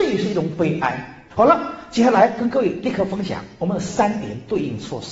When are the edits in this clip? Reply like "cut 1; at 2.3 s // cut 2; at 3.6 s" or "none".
cut 1; at 1.3 s